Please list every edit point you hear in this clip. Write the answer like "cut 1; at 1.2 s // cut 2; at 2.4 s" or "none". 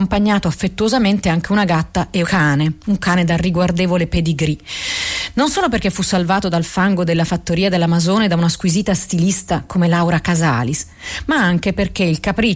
cut 1; at 2.2 s